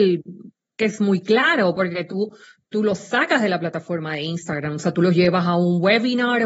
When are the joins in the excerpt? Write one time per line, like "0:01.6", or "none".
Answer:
none